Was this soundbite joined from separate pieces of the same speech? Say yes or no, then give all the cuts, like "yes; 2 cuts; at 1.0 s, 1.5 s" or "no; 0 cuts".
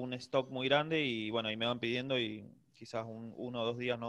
no; 0 cuts